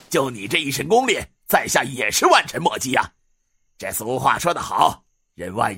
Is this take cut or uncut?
uncut